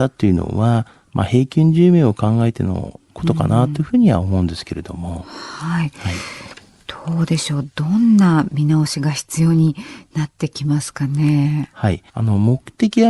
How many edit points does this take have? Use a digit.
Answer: 1